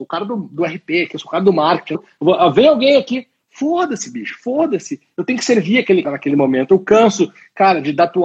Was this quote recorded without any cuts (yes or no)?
no